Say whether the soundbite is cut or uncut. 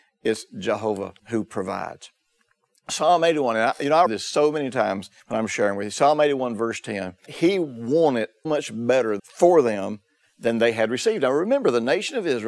cut